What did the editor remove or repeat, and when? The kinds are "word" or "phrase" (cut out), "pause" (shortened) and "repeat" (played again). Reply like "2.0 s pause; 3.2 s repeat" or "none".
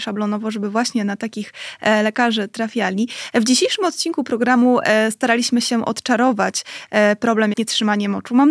7.5 s phrase